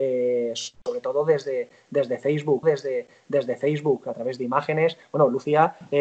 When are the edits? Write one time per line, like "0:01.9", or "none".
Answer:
0:02.6